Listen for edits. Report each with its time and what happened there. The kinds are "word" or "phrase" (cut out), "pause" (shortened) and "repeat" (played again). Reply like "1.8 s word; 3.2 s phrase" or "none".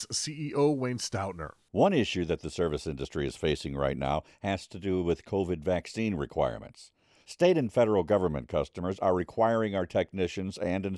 none